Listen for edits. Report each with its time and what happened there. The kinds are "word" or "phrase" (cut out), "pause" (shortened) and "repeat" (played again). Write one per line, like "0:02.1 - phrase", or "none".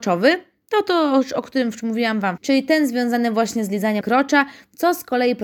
0:02.4 - word
0:04.0 - word

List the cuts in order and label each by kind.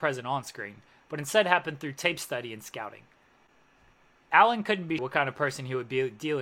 0:05.0 - word

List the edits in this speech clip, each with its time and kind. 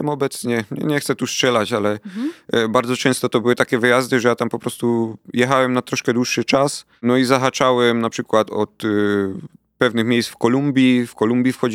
none

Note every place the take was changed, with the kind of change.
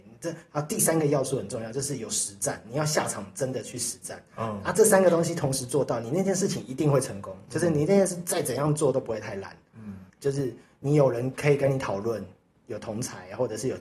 0:10.1 - word

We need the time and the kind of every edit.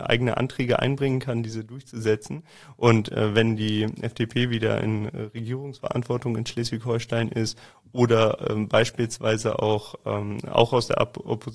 none

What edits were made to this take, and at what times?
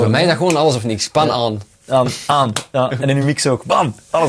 none

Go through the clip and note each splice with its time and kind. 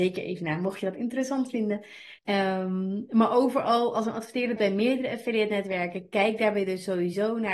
0:02.2 - pause
0:04.6 - word

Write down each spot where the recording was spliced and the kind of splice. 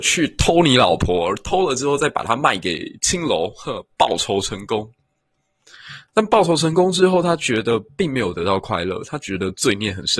none

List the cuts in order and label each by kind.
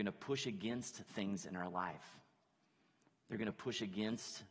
none

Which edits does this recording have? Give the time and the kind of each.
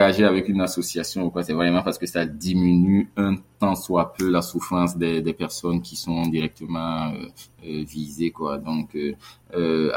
none

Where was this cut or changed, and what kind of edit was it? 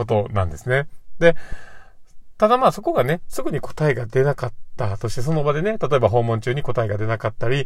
none

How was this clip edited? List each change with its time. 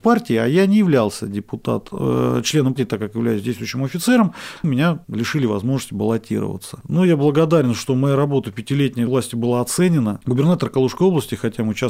0:02.8 - word
0:04.6 - word
0:05.0 - pause
0:09.1 - phrase

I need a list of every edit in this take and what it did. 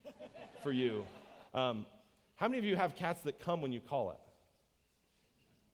0:01.5 - pause

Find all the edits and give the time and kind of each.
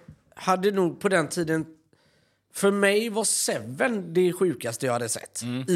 none

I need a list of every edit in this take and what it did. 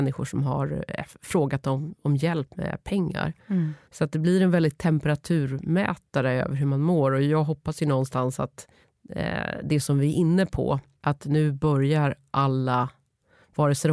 0:03.8 - pause
0:08.8 - pause

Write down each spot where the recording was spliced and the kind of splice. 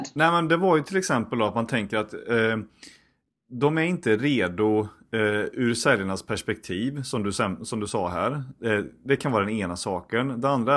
none

